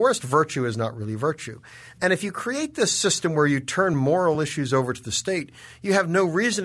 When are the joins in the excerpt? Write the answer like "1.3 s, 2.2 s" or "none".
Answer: none